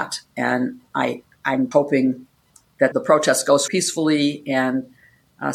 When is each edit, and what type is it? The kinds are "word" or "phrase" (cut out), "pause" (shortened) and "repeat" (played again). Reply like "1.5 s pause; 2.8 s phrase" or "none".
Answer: 1.7 s word; 2.9 s word; 3.7 s word